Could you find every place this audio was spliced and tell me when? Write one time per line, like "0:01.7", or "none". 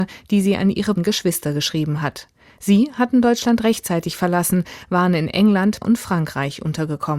0:01.0
0:05.8